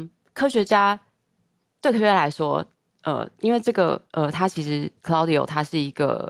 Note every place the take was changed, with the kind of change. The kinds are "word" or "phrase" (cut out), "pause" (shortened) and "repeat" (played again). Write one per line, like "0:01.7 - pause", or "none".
none